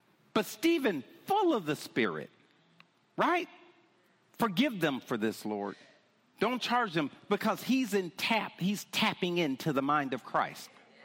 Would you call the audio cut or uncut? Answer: uncut